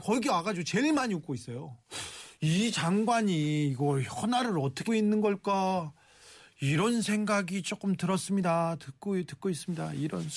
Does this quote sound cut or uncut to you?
cut